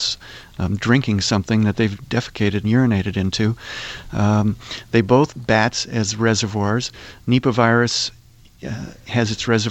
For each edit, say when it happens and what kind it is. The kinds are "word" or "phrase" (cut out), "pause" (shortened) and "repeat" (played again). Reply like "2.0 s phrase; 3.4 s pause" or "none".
2.6 s word; 5.3 s word